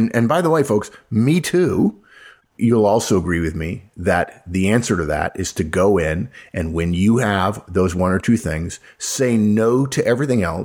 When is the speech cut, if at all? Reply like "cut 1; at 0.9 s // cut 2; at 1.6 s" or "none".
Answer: none